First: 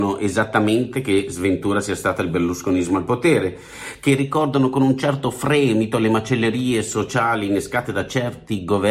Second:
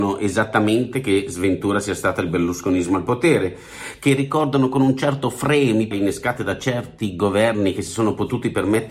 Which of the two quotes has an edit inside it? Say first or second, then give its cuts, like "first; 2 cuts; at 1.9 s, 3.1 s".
second; 1 cut; at 5.9 s